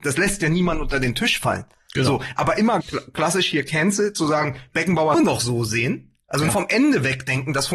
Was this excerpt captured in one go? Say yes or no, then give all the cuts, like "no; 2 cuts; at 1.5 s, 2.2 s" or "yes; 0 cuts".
no; 3 cuts; at 2.8 s, 5.1 s, 6.5 s